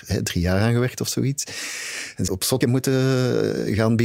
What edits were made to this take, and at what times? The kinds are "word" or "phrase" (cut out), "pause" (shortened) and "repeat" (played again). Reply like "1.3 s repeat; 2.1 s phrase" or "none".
2.3 s word; 2.6 s word